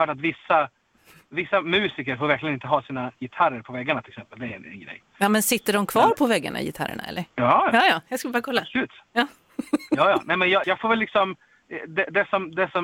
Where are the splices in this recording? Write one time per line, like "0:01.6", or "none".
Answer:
0:07.3
0:10.6